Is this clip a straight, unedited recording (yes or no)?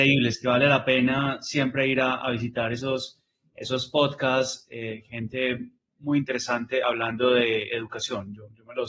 yes